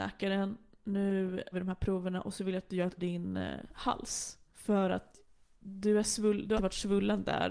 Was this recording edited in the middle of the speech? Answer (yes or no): yes